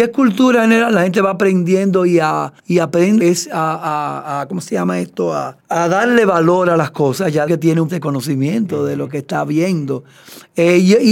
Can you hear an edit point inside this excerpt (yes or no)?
yes